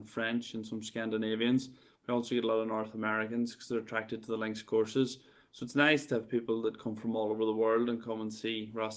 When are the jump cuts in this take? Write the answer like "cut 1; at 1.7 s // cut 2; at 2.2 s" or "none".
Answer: none